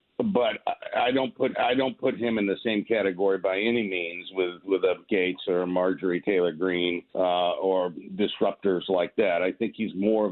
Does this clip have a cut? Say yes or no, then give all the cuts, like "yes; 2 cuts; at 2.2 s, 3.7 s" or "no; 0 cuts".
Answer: yes; 3 cuts; at 1.5 s, 5.1 s, 7.1 s